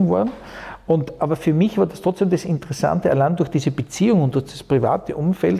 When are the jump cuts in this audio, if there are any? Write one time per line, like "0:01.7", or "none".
none